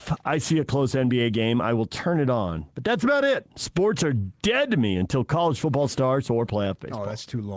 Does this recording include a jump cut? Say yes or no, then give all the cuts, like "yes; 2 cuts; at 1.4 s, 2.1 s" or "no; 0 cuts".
no; 0 cuts